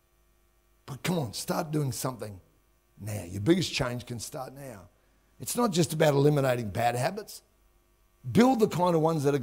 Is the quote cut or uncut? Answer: uncut